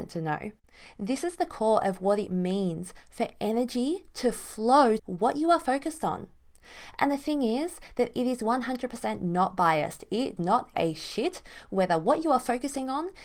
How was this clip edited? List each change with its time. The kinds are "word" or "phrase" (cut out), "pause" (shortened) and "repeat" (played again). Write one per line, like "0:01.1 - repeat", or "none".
0:05.0 - word
0:10.4 - word
0:10.7 - word